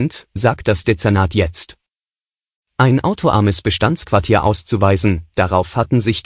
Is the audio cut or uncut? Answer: uncut